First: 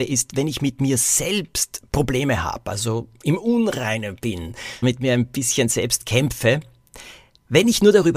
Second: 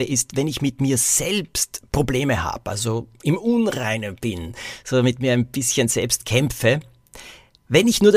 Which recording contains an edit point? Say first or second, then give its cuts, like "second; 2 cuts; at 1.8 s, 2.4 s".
first; 1 cut; at 4.8 s